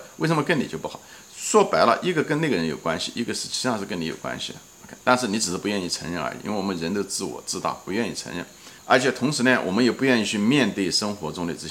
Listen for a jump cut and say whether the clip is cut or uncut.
cut